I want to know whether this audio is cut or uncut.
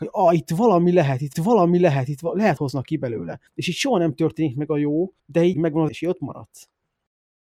cut